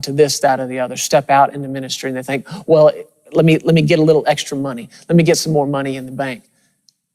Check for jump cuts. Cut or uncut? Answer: uncut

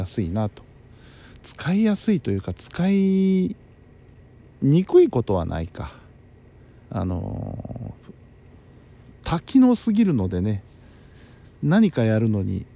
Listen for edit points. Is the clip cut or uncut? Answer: cut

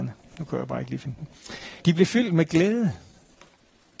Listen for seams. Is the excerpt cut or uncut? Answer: cut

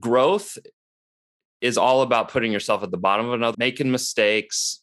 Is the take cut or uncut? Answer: cut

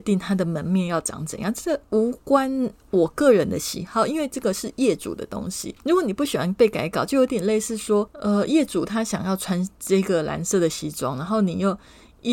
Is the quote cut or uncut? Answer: uncut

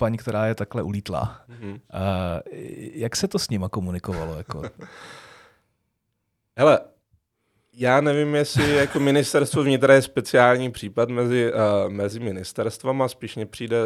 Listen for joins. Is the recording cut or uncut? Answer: uncut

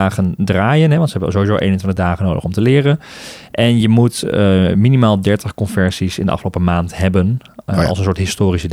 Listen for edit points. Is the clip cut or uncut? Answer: uncut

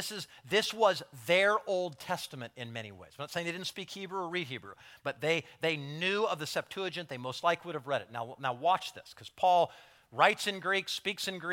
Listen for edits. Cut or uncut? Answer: uncut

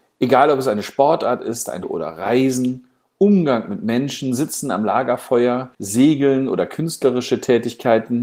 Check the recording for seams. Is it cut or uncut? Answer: cut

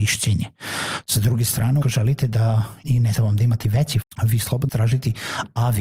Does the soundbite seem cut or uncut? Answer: cut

